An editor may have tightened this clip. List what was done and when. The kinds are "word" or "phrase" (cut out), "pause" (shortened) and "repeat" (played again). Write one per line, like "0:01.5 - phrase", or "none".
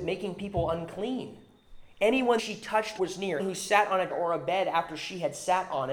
0:02.4 - word
0:03.0 - word
0:03.4 - word
0:04.1 - word